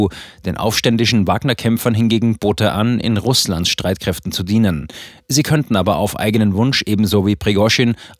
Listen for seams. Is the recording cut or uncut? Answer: uncut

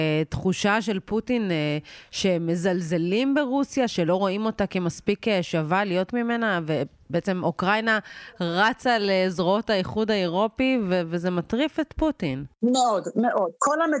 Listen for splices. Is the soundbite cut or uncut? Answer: cut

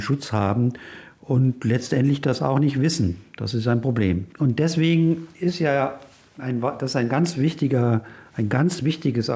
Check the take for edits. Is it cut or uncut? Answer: uncut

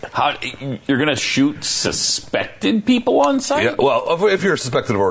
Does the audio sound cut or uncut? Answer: uncut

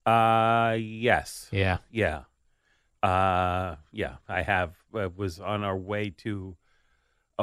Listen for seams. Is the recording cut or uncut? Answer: uncut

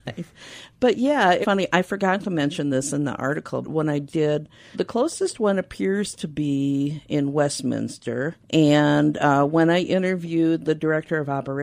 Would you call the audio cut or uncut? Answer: cut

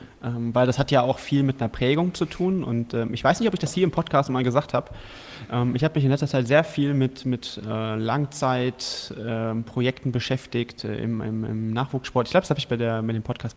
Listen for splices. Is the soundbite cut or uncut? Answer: uncut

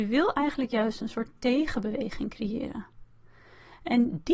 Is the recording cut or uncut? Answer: uncut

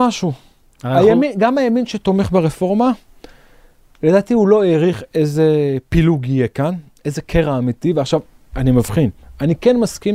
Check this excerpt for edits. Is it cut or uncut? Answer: uncut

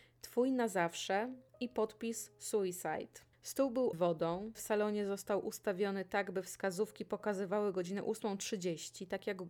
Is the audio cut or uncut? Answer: cut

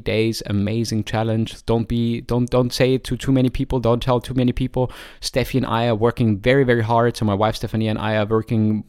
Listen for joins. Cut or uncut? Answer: uncut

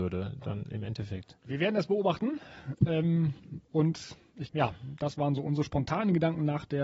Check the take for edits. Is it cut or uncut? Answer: cut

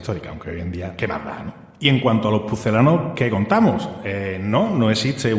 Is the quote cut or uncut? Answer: uncut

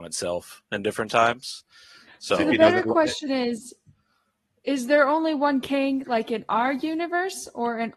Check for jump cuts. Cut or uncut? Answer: uncut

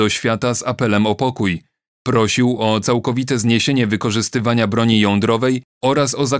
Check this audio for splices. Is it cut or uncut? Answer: uncut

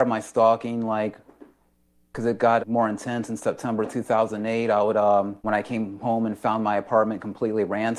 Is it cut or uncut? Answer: cut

